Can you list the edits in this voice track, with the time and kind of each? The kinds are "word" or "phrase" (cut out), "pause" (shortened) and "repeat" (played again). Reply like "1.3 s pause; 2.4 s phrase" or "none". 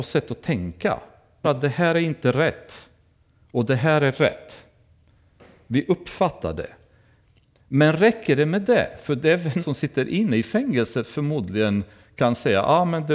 1.4 s word; 9.6 s word

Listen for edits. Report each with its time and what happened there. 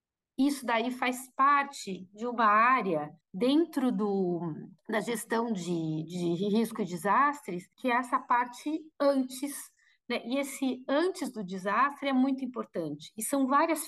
3.2 s pause; 4.8 s pause; 7.7 s pause

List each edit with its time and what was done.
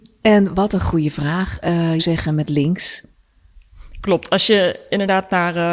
2.0 s phrase

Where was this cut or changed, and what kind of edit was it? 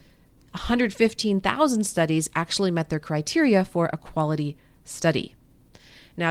none

